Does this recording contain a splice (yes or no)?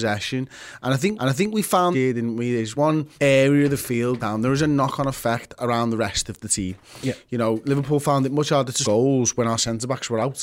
yes